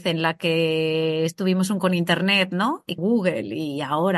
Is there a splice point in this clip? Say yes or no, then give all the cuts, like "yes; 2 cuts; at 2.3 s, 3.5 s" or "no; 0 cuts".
yes; 2 cuts; at 1.8 s, 3.0 s